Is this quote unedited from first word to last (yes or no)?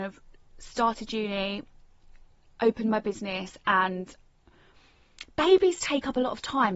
yes